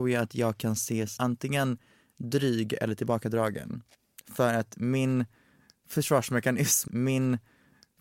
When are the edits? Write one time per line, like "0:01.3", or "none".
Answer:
0:01.2
0:06.9